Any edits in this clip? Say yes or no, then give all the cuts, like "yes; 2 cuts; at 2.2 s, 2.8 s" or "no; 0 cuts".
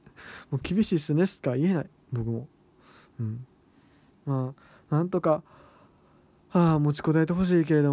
no; 0 cuts